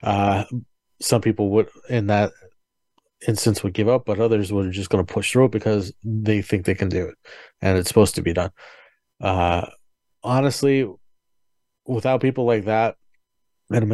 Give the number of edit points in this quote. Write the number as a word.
zero